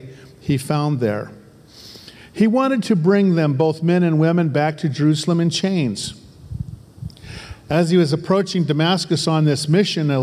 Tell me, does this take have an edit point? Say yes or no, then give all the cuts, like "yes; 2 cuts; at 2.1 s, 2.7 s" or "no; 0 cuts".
no; 0 cuts